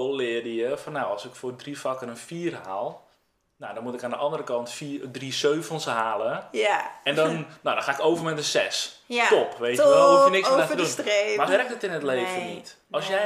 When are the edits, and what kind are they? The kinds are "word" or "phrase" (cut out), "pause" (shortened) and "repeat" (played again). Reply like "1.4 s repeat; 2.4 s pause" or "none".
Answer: 11.5 s word